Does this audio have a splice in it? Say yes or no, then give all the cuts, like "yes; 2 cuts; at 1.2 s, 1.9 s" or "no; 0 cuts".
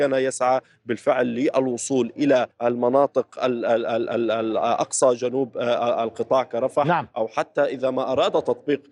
yes; 1 cut; at 2.5 s